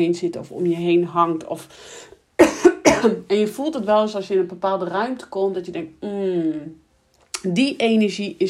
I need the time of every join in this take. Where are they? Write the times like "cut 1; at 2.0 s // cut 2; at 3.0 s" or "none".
none